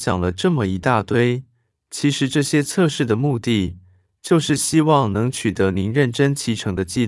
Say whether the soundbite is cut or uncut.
uncut